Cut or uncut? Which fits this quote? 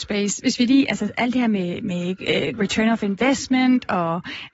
cut